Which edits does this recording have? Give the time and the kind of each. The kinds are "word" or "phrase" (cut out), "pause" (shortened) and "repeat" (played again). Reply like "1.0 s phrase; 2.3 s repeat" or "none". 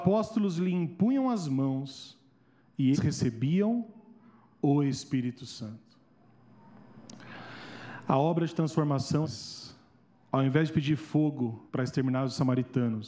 2.9 s word; 9.2 s word; 11.7 s pause